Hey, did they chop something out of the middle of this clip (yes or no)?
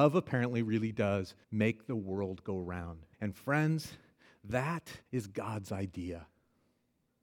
yes